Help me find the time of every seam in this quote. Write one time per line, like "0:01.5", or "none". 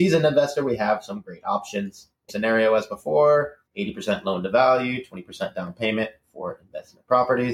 0:02.3
0:03.7